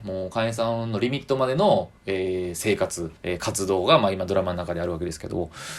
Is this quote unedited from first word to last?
no; 2 cuts; at 2.0 s, 3.2 s

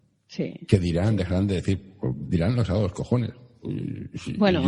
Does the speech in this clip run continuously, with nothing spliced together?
yes; 0 cuts

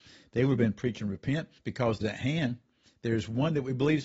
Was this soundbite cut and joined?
yes; 2 cuts; at 1.6 s, 2.0 s

